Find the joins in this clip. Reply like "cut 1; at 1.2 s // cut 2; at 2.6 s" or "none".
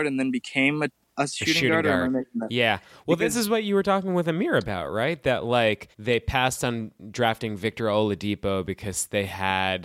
cut 1; at 5.9 s